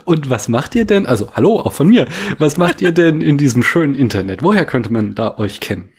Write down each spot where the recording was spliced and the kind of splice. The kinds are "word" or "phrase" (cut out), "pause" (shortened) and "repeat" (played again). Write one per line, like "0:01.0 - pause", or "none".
none